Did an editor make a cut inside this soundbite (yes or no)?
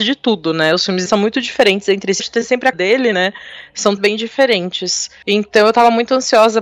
yes